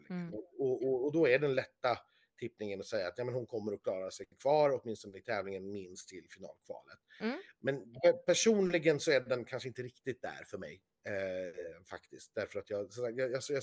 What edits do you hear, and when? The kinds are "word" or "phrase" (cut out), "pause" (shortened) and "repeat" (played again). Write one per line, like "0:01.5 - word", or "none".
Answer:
none